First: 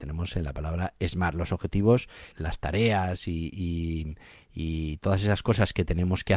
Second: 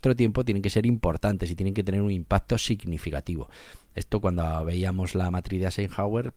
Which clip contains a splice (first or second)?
first